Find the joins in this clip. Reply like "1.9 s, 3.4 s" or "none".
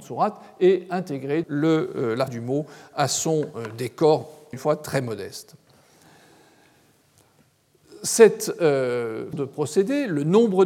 1.4 s, 2.3 s, 4.5 s, 9.3 s